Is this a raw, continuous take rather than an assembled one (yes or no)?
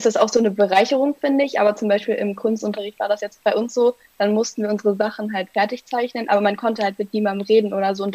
yes